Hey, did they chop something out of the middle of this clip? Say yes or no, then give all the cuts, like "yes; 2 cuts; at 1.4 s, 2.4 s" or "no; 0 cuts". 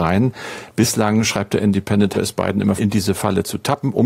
yes; 2 cuts; at 2.1 s, 2.8 s